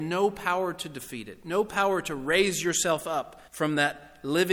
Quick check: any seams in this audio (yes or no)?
yes